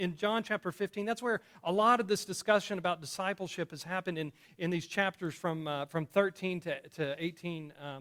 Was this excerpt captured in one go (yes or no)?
yes